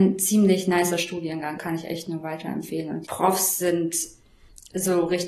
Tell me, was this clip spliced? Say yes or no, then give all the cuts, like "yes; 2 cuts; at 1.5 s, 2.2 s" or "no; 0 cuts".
yes; 2 cuts; at 1.6 s, 3.0 s